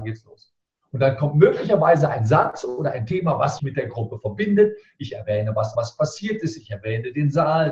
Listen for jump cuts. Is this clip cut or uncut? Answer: cut